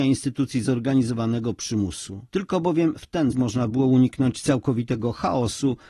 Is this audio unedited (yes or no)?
no